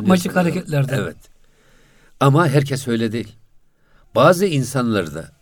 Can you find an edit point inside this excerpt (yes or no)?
no